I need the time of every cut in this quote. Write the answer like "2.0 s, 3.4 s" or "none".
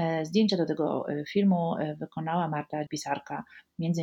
2.9 s